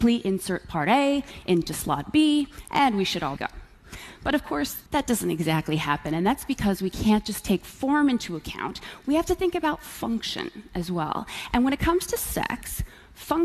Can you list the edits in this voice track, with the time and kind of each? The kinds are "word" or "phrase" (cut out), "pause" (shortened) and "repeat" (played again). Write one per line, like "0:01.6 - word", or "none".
0:03.4 - phrase
0:04.9 - pause